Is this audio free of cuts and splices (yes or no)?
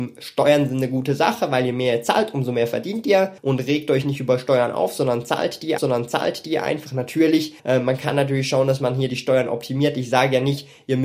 no